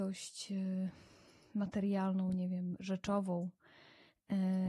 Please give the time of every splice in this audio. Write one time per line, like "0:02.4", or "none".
none